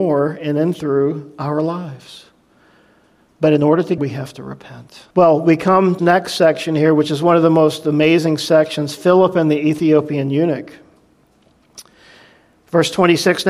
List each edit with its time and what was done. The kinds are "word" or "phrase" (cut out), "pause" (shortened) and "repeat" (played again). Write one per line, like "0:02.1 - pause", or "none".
0:04.0 - phrase
0:05.1 - pause
0:06.0 - phrase

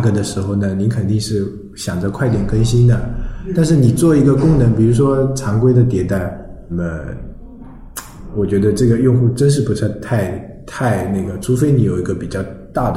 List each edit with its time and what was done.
0:06.7 - word

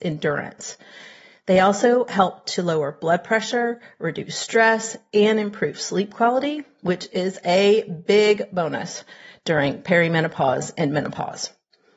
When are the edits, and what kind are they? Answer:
none

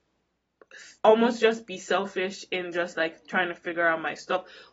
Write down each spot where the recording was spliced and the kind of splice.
0:01.0 - pause

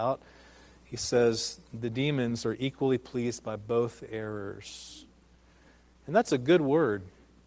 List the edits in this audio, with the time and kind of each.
none

